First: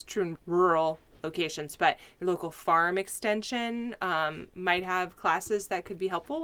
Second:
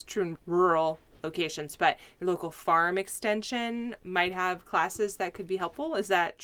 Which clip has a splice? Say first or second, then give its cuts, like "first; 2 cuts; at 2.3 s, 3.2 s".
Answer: second; 1 cut; at 4.0 s